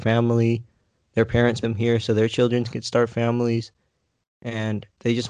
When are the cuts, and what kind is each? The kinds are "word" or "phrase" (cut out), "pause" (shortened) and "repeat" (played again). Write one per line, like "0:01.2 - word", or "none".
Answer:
0:01.6 - word